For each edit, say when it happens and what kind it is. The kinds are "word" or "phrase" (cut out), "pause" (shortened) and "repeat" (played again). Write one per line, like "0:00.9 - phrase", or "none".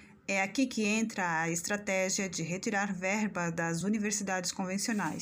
none